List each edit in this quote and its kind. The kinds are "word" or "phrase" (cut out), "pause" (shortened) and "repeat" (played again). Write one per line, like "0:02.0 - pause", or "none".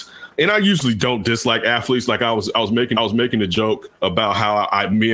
0:02.9 - repeat
0:04.0 - pause